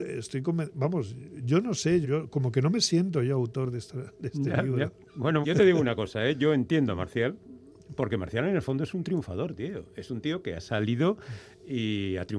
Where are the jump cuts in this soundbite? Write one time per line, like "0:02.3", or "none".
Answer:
0:02.0
0:05.4